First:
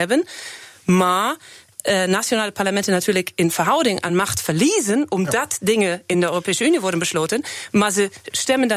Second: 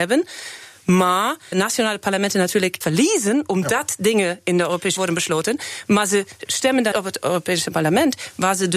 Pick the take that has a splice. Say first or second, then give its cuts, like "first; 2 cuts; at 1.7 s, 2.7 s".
second; 4 cuts; at 1.5 s, 2.8 s, 5.0 s, 6.9 s